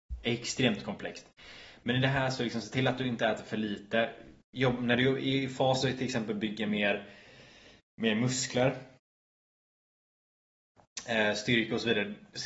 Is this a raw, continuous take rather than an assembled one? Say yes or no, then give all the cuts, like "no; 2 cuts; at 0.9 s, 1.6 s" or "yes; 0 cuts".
yes; 0 cuts